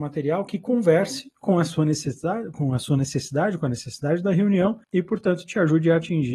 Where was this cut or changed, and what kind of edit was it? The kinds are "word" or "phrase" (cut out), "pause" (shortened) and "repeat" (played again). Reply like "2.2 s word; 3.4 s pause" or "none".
4.8 s pause